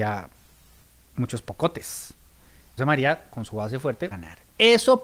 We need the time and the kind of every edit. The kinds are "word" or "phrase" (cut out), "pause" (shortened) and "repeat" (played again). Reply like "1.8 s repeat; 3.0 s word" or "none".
2.8 s word; 4.1 s word